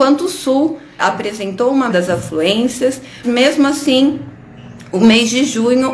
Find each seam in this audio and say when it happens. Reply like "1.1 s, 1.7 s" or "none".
1.0 s, 1.9 s, 3.2 s